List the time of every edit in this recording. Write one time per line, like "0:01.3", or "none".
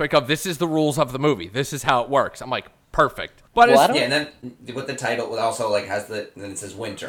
0:03.5